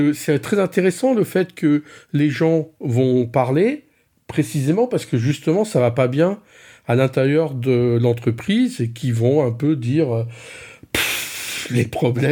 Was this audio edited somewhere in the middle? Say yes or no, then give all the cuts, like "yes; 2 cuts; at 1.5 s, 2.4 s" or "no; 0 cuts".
no; 0 cuts